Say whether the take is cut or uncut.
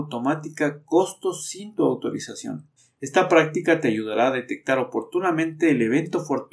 cut